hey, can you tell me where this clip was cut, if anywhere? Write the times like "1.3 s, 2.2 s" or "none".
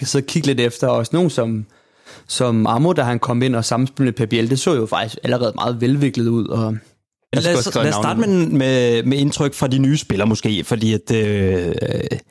none